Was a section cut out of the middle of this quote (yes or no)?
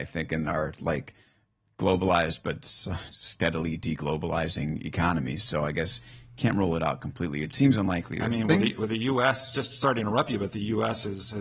no